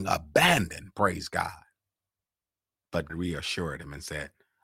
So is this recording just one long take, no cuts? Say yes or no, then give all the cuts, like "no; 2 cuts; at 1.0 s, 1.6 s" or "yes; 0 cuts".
no; 1 cut; at 3.1 s